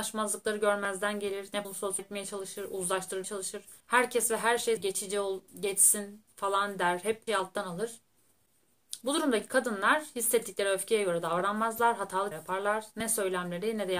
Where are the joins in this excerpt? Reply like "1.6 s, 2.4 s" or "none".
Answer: 1.6 s, 2.0 s, 3.2 s, 3.8 s, 4.8 s, 5.5 s, 7.3 s, 12.3 s